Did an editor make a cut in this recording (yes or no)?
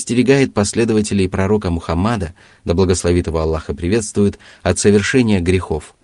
no